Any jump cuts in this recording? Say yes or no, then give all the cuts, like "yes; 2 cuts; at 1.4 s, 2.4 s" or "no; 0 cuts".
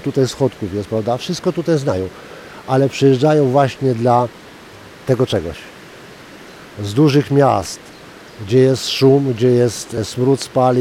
no; 0 cuts